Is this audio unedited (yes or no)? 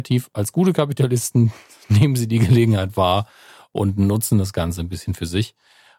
yes